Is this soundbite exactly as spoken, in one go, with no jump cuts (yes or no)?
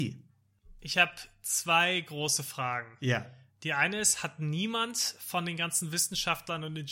yes